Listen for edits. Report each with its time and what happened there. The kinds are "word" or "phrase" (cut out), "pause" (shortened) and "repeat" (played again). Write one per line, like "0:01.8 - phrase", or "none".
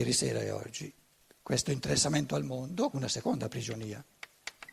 0:01.1 - pause
0:02.9 - word